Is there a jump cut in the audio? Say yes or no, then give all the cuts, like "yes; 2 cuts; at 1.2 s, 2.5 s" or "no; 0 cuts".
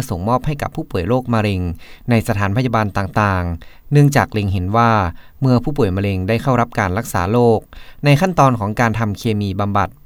no; 0 cuts